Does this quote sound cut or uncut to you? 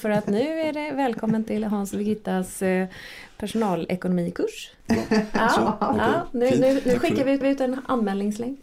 cut